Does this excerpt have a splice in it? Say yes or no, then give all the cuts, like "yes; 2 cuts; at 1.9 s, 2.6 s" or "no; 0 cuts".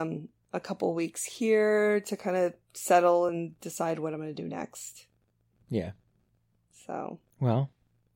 no; 0 cuts